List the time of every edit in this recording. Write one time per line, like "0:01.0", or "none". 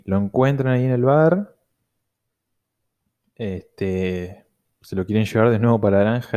none